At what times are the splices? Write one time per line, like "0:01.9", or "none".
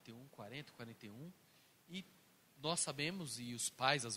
none